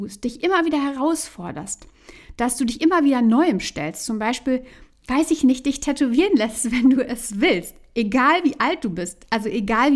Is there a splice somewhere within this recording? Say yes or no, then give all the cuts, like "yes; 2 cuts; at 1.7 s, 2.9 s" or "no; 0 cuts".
no; 0 cuts